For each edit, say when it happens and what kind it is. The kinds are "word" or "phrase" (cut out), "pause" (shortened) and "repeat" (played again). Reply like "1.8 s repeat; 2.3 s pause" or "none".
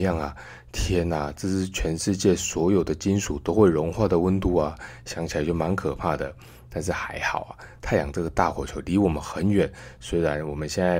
none